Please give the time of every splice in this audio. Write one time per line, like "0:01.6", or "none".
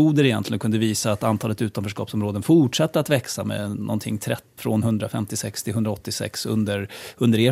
0:04.6